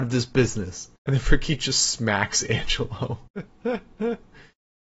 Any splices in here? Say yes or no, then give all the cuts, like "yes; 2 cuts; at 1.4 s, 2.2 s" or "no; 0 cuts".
yes; 2 cuts; at 0.9 s, 3.3 s